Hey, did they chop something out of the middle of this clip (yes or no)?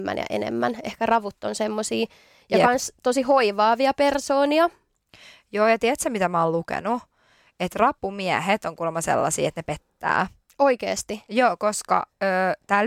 no